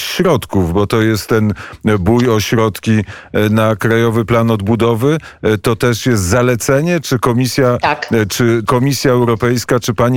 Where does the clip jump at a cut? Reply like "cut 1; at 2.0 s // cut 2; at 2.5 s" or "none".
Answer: cut 1; at 8.7 s